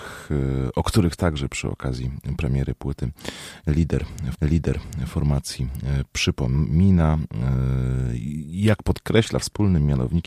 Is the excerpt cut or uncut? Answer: cut